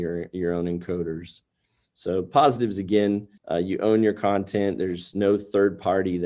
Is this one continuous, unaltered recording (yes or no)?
no